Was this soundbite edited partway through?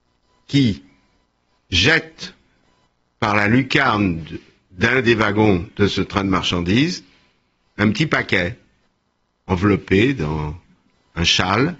no; 0 cuts

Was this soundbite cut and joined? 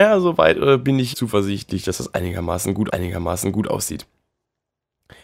yes; 2 cuts; at 1.1 s, 2.9 s

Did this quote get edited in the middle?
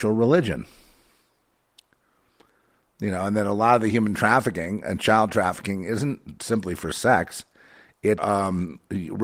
yes; 1 cut; at 8.2 s

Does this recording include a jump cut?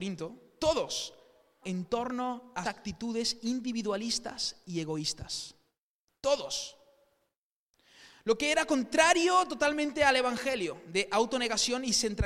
yes; 2 cuts; at 1.6 s, 2.6 s

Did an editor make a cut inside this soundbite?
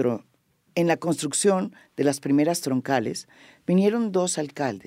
no; 0 cuts

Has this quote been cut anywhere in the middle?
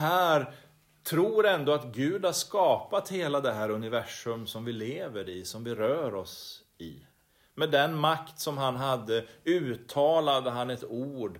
no; 0 cuts

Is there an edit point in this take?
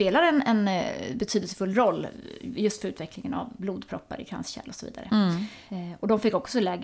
no; 0 cuts

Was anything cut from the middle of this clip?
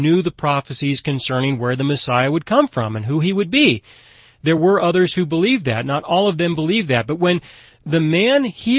no; 0 cuts

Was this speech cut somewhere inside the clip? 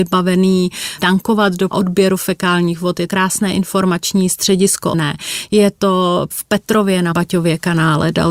yes; 6 cuts; at 1.0 s, 1.7 s, 3.1 s, 4.9 s, 6.3 s, 7.1 s

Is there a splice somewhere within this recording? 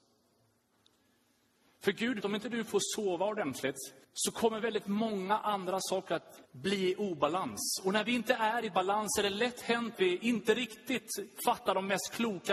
yes; 4 cuts; at 2.2 s, 4.0 s, 6.4 s, 9.9 s

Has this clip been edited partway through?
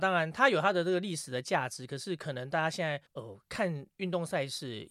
yes; 1 cut; at 3.1 s

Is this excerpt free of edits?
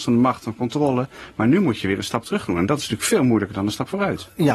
yes; 0 cuts

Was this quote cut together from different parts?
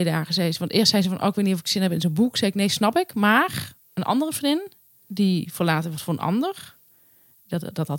no; 0 cuts

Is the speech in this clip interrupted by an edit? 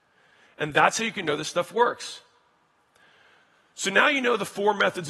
no; 0 cuts

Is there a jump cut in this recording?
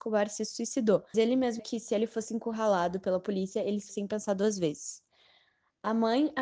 yes; 3 cuts; at 1.1 s, 1.6 s, 3.9 s

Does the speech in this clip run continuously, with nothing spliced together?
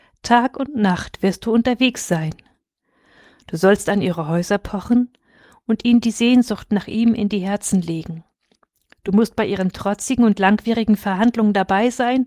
yes; 0 cuts

